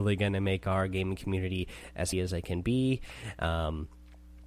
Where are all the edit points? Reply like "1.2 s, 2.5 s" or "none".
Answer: 2.1 s